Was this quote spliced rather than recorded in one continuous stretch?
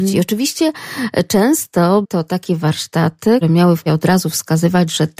yes; 3 cuts; at 2.0 s, 3.4 s, 3.9 s

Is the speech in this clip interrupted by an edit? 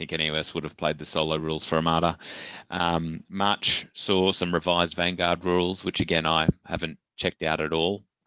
no; 0 cuts

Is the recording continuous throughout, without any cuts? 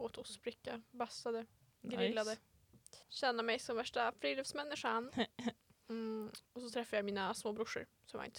no; 3 cuts; at 1.6 s, 3.0 s, 6.4 s

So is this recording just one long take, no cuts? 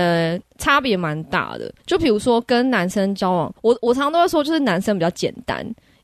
no; 2 cuts; at 1.8 s, 3.6 s

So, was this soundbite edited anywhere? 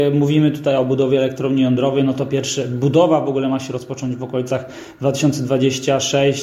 no; 0 cuts

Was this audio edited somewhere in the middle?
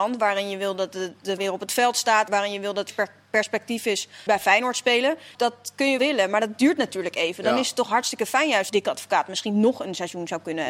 yes; 7 cuts; at 1.4 s, 2.3 s, 2.9 s, 4.3 s, 5.3 s, 6.0 s, 8.7 s

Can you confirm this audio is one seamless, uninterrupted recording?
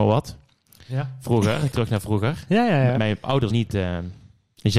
no; 3 cuts; at 1.7 s, 3.0 s, 3.5 s

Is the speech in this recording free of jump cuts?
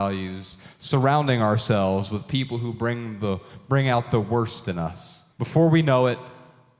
no; 1 cut; at 5.3 s

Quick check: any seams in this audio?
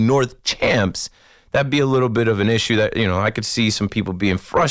no; 0 cuts

